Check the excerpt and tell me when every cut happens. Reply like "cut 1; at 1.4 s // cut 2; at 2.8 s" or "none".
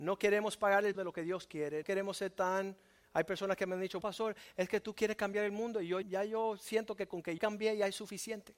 cut 1; at 0.9 s // cut 2; at 1.8 s // cut 3; at 4.0 s // cut 4; at 6.0 s // cut 5; at 7.4 s